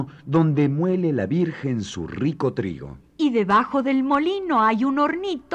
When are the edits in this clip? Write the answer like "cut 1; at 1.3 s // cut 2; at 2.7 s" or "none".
none